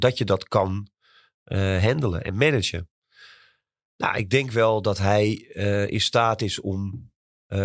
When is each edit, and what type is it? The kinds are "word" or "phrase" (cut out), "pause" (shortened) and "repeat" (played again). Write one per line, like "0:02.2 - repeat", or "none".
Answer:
none